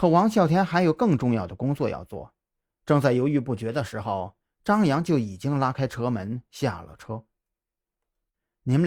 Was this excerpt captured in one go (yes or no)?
yes